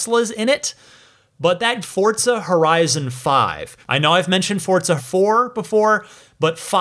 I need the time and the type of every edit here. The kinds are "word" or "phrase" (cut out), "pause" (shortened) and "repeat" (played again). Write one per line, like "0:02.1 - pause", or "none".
0:01.8 - phrase
0:03.8 - pause
0:05.0 - word